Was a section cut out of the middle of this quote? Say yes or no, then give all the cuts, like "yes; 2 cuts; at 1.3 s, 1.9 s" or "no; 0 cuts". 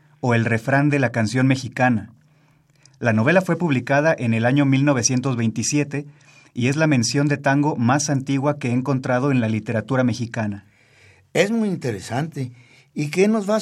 no; 0 cuts